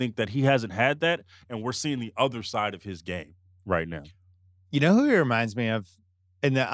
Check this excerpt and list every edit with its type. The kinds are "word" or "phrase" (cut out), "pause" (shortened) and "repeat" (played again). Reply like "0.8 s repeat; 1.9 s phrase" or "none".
none